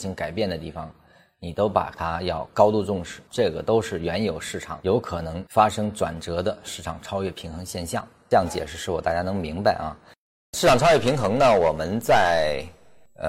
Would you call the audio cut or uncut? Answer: uncut